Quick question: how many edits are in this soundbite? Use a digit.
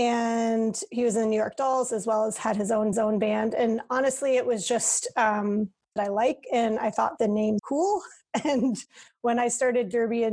4